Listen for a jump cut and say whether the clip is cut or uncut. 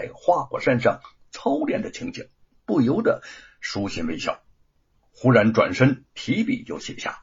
uncut